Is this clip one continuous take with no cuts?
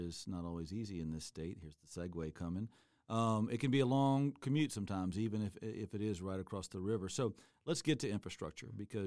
yes; 0 cuts

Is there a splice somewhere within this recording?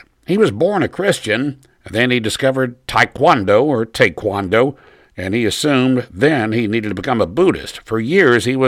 no; 0 cuts

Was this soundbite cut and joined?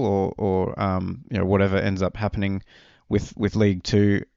no; 0 cuts

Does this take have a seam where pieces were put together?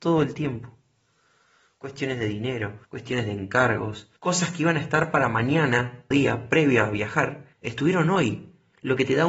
yes; 4 cuts; at 2.8 s, 4.2 s, 6.1 s, 7.5 s

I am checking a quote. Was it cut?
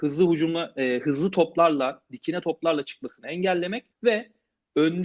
yes; 1 cut; at 3.9 s

